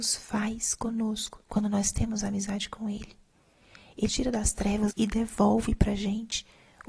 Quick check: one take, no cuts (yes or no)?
no